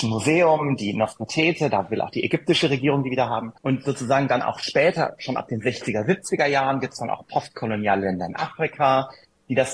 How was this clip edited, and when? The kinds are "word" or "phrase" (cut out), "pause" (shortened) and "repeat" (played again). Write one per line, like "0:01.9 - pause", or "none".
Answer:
0:03.6 - pause